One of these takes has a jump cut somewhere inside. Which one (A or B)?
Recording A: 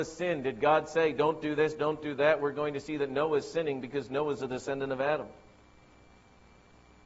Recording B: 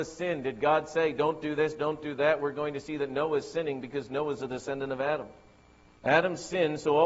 B